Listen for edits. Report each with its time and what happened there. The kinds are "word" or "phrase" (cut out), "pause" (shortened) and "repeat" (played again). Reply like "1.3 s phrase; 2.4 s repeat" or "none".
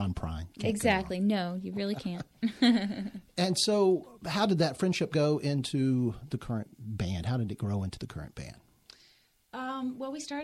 none